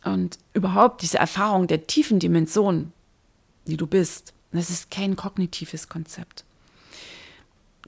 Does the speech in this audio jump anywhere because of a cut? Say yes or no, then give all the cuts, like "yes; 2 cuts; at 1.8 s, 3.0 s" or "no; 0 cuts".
no; 0 cuts